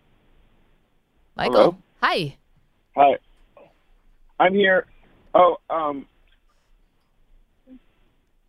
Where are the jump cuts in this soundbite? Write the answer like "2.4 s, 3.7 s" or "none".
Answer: none